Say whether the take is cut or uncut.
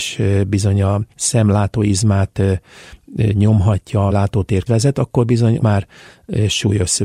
cut